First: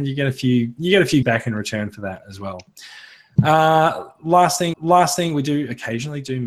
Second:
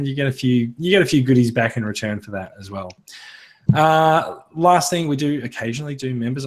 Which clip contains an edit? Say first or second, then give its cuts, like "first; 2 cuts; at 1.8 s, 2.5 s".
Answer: first; 2 cuts; at 1.2 s, 4.7 s